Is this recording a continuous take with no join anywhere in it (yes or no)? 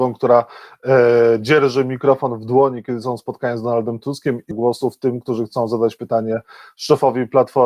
no